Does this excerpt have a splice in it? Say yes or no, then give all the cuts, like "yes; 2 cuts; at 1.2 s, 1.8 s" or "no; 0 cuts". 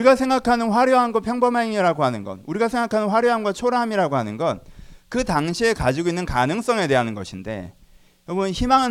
no; 0 cuts